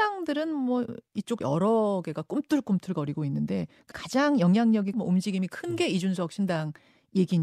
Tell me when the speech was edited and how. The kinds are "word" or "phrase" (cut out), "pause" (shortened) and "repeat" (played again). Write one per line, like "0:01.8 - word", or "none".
0:01.4 - word
0:03.9 - word
0:04.9 - word